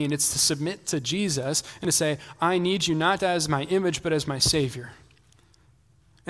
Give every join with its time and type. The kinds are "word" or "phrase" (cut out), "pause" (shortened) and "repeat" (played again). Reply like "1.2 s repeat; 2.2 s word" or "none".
3.2 s word